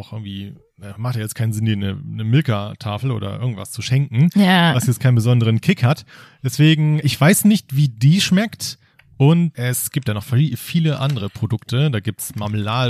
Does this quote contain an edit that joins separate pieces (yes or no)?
yes